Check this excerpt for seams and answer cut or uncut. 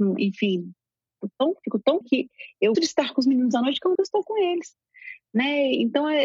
cut